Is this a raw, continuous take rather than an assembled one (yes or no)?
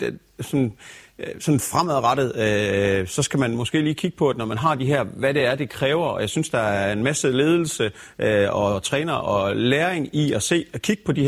yes